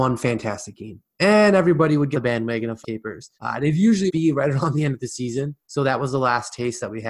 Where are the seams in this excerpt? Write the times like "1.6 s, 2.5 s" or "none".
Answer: 2.1 s, 2.8 s, 3.3 s, 4.1 s, 5.6 s